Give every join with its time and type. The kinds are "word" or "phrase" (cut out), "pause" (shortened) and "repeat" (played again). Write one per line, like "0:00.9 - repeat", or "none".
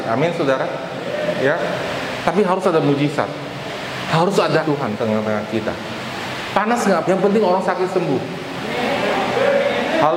0:04.6 - word
0:05.0 - word
0:07.0 - word